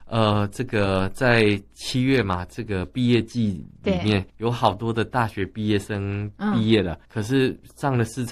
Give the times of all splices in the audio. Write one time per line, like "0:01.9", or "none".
0:04.3
0:07.0